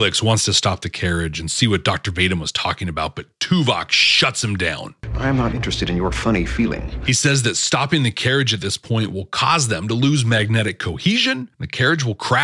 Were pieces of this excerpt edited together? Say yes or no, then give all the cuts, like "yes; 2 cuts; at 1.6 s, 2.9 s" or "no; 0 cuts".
yes; 1 cut; at 11.5 s